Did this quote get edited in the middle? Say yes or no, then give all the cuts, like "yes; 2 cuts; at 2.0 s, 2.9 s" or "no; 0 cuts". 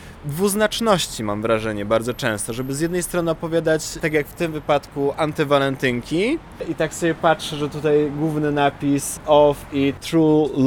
yes; 1 cut; at 9.2 s